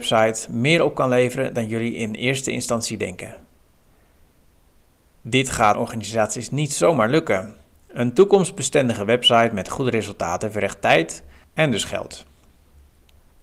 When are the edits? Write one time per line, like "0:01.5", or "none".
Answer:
0:05.7
0:11.4